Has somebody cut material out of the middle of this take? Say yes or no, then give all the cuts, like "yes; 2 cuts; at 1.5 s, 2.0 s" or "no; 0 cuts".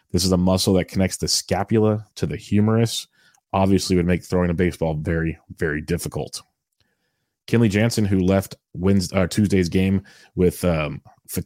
no; 0 cuts